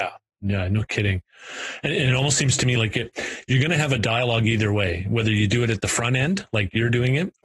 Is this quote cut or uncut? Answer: uncut